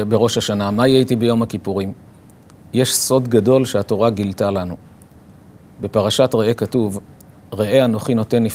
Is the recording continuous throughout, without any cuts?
no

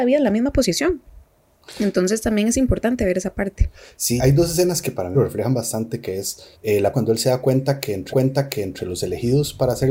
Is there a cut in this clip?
yes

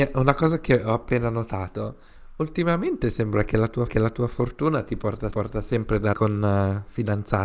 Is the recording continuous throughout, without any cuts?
no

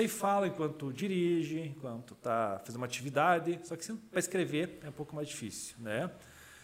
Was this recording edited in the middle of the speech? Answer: no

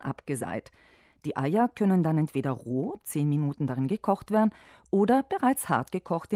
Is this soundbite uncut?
yes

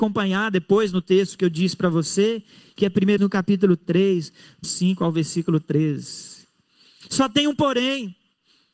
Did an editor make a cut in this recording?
yes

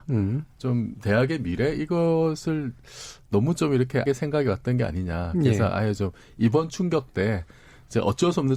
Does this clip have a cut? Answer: yes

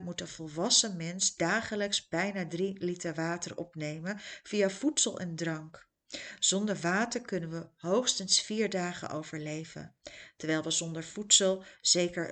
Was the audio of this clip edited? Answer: no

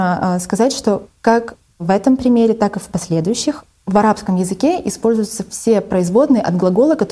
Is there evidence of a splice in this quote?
no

